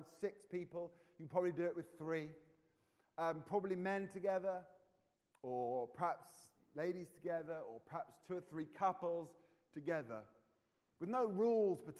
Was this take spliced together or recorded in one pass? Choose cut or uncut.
uncut